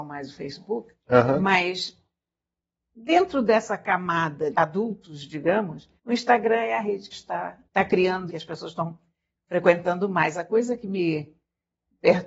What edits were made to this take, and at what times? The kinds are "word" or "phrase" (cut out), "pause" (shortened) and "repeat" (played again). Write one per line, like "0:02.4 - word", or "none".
0:01.0 - pause
0:04.5 - word
0:06.0 - pause
0:07.1 - phrase
0:07.7 - pause
0:08.3 - phrase